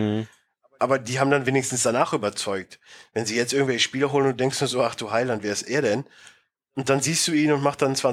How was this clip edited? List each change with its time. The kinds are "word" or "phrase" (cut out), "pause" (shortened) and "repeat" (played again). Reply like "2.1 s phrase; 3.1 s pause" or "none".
none